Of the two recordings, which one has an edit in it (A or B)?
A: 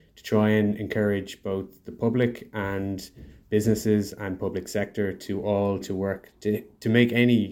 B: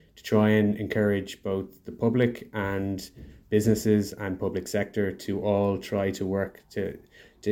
A